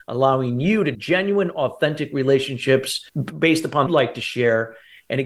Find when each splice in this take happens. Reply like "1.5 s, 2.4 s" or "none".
0.9 s, 3.1 s, 3.9 s